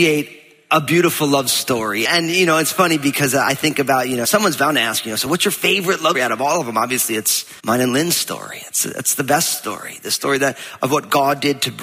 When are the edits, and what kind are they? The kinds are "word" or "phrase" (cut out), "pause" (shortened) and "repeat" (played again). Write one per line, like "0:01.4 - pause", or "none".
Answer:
0:04.2 - word
0:06.1 - word
0:07.6 - pause